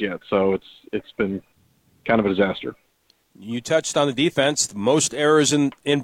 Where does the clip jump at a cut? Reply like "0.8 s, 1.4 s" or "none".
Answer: none

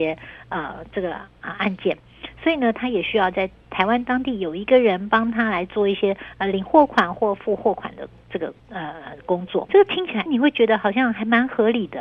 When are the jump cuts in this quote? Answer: 8.6 s, 9.7 s, 10.3 s

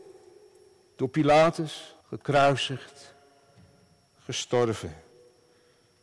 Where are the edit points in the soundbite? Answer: 2.0 s

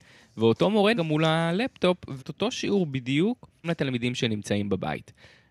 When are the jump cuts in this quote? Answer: 0.9 s, 2.2 s, 3.6 s

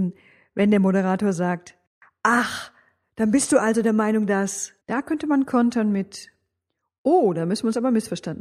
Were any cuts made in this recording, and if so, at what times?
4.8 s

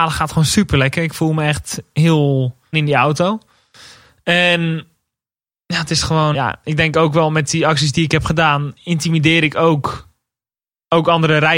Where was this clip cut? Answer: 2.7 s, 6.3 s

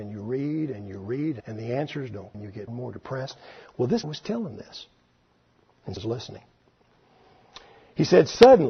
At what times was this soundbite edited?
1.4 s, 2.3 s, 2.7 s, 4.0 s, 6.0 s

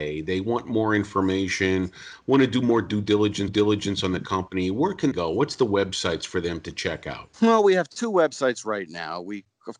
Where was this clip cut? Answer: 3.5 s, 5.1 s, 7.3 s

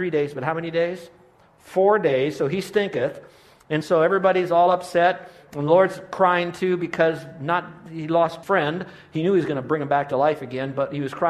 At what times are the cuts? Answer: 8.4 s

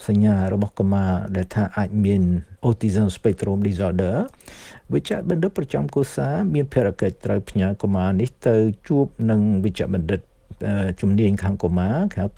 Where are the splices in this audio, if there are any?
2.6 s

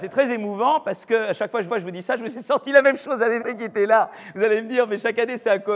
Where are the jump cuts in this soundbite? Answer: 1.7 s, 3.4 s

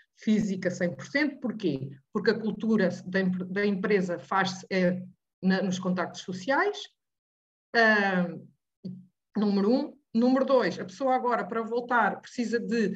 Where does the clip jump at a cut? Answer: none

